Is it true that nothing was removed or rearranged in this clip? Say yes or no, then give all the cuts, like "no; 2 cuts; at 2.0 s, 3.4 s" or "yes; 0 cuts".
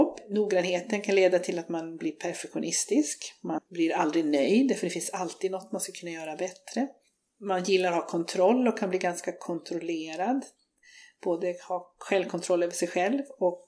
yes; 0 cuts